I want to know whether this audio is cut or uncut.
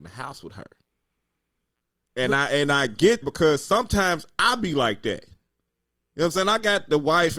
cut